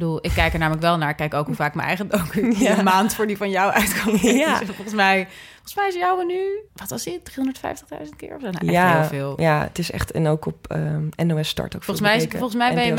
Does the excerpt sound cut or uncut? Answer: cut